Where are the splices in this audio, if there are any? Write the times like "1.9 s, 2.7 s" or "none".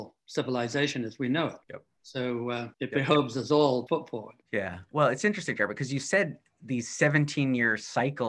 1.6 s, 2.7 s, 3.9 s, 4.4 s